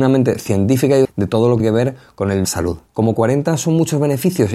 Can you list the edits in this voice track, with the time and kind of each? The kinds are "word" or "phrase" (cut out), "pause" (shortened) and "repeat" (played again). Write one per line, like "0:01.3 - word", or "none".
0:01.0 - word
0:01.6 - word
0:02.4 - phrase
0:02.9 - pause